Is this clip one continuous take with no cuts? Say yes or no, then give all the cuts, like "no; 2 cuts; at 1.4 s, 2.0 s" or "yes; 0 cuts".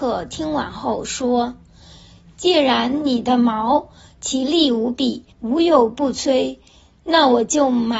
no; 1 cut; at 5.3 s